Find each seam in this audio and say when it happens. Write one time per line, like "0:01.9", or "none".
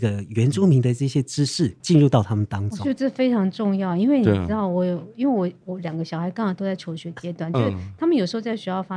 0:01.8